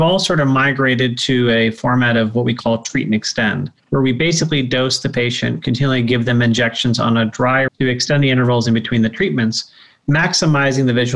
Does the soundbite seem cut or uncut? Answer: cut